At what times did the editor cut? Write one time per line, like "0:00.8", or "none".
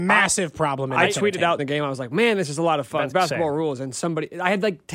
0:01.6
0:03.1